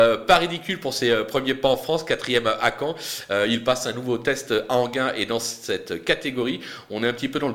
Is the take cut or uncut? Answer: uncut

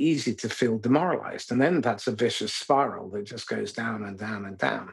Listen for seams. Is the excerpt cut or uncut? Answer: uncut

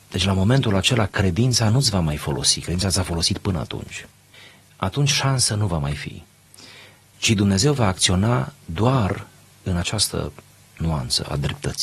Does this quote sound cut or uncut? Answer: uncut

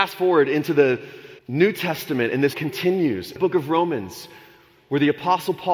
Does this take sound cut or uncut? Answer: cut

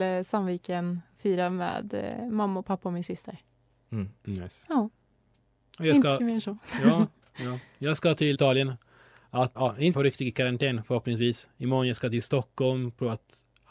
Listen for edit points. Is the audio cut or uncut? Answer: cut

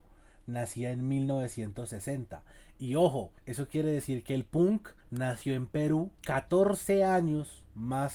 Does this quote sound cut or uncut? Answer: cut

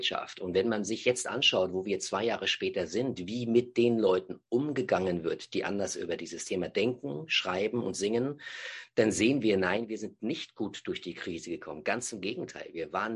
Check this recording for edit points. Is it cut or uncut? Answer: uncut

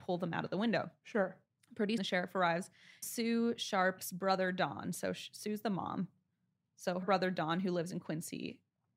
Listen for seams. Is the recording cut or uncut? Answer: cut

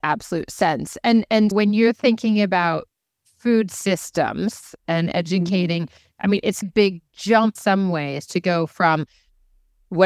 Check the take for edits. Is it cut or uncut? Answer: cut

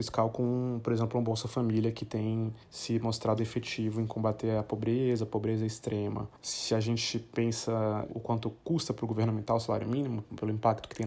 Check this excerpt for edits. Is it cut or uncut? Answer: cut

